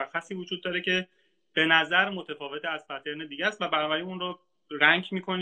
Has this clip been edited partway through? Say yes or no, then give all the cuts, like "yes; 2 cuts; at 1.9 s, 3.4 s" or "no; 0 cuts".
no; 0 cuts